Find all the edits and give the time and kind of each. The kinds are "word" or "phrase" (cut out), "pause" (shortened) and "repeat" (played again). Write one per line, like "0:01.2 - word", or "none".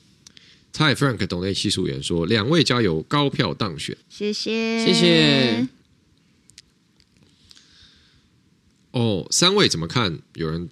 0:04.0 - pause